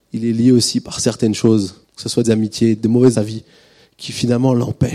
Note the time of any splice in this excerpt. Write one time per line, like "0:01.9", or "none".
0:01.8
0:02.2
0:02.8
0:03.1